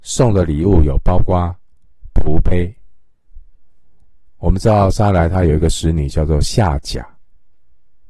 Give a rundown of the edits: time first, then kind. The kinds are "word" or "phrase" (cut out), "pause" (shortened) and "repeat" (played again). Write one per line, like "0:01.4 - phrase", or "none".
none